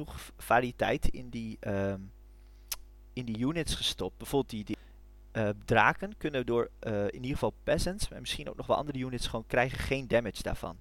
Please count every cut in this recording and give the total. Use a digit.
0